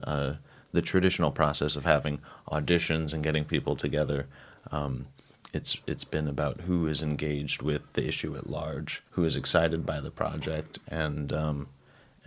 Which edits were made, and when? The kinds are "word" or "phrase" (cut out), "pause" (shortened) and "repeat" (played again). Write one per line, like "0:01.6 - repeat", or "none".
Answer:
0:09.1 - pause